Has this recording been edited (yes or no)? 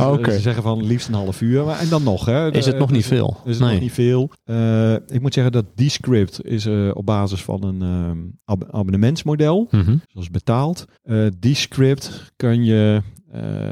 yes